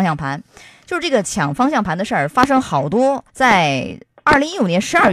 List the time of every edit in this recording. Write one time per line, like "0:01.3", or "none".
0:03.3